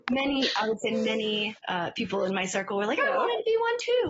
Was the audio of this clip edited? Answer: yes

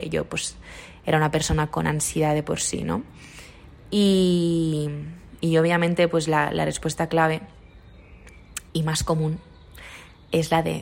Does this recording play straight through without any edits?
no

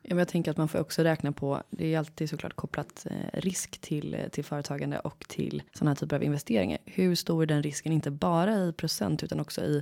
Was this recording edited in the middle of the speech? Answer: yes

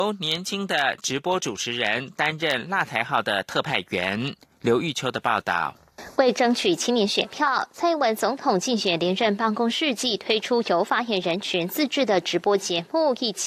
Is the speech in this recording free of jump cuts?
yes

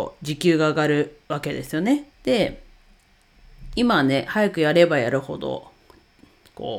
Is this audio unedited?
no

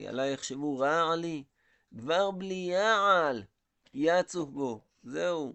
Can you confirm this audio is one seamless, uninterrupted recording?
yes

